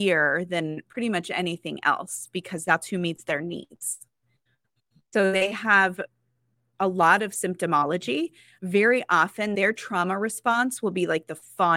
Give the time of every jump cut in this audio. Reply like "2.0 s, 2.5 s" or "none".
none